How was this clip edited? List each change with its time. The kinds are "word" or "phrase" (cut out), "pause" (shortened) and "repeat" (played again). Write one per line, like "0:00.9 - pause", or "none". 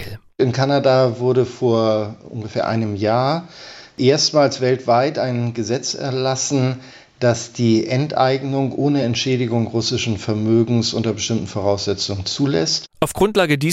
none